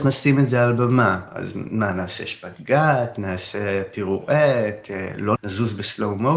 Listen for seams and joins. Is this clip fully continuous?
no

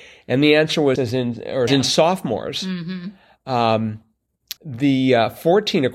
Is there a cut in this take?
yes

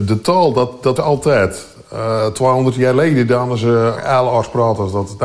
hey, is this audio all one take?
no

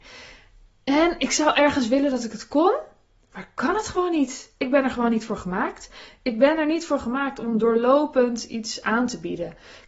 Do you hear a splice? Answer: no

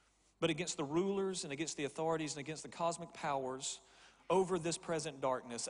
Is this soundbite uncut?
yes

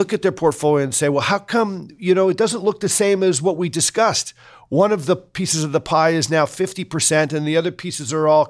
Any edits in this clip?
no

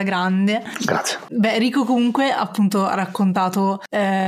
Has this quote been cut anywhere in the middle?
no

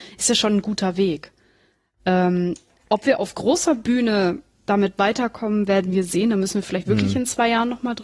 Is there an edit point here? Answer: no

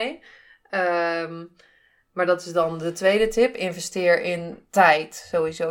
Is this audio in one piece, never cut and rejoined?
yes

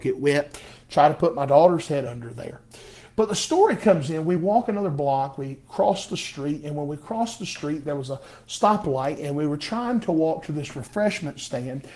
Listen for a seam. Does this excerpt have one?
no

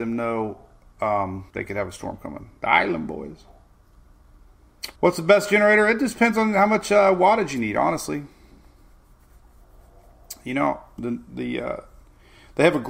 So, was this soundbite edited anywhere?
yes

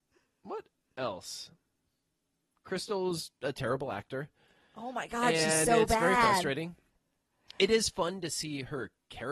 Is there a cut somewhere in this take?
no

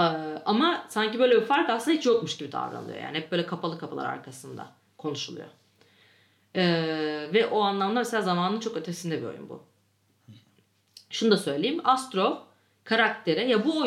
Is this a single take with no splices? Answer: yes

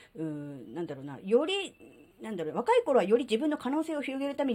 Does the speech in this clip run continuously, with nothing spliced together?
no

